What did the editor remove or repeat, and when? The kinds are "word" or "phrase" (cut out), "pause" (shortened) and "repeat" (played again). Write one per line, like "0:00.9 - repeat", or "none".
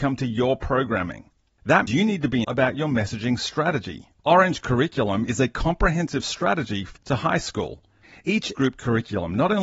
0:01.9 - word
0:02.4 - word
0:04.2 - pause
0:07.0 - word
0:08.5 - word

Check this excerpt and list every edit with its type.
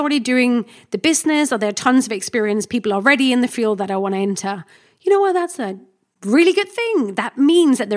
none

